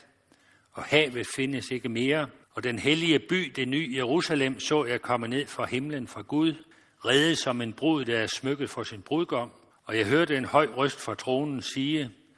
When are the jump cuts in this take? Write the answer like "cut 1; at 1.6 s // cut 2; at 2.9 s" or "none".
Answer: cut 1; at 2.4 s // cut 2; at 6.7 s // cut 3; at 9.7 s